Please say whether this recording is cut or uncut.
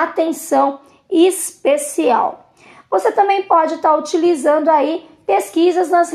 uncut